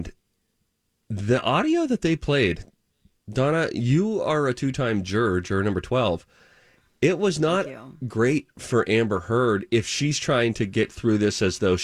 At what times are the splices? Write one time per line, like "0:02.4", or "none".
none